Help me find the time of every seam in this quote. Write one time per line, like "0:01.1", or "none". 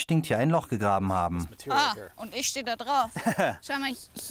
none